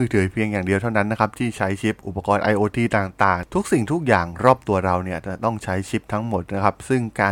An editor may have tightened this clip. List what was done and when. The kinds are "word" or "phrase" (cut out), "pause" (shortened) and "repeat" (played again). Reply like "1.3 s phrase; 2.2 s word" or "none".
none